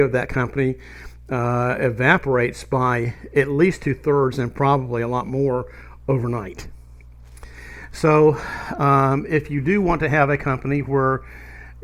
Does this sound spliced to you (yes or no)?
no